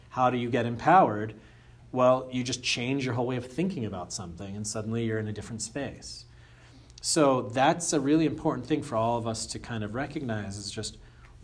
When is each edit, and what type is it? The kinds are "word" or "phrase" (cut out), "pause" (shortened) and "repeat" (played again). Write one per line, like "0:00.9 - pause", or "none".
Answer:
none